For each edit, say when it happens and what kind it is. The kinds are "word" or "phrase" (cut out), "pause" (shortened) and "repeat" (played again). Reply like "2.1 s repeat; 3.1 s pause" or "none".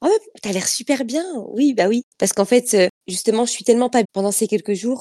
3.0 s pause; 4.0 s word